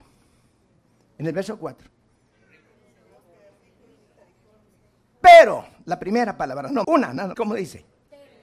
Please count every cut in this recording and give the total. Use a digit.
2